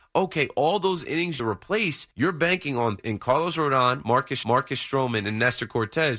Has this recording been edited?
yes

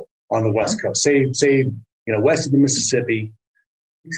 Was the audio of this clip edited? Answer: no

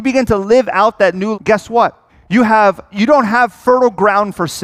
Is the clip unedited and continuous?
no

